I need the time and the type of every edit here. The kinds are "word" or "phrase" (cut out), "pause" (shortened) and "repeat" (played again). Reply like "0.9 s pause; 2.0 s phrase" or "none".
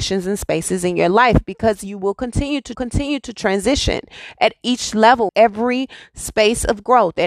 2.7 s repeat; 5.3 s word